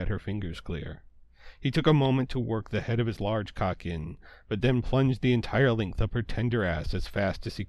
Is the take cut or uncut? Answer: uncut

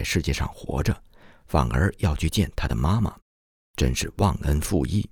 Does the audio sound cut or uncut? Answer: uncut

